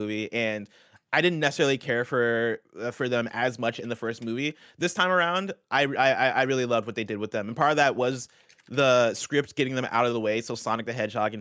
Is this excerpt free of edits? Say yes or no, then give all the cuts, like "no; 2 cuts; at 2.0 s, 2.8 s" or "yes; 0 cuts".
yes; 0 cuts